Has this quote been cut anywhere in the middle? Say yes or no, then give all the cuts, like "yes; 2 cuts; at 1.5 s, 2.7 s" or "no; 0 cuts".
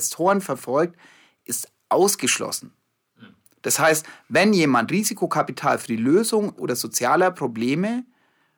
yes; 1 cut; at 6.6 s